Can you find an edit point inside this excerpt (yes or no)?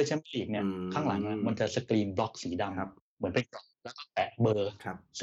yes